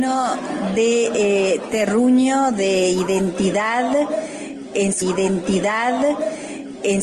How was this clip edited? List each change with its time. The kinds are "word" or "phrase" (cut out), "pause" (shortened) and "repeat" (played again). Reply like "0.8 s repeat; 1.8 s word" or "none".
5.0 s repeat